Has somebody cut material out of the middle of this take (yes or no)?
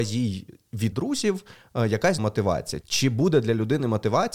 yes